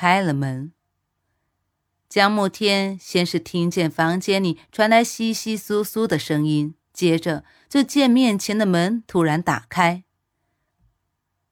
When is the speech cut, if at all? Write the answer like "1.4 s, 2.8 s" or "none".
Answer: 6.8 s